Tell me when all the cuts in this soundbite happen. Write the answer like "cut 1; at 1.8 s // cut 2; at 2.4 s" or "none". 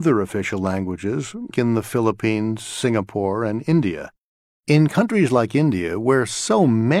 cut 1; at 1.5 s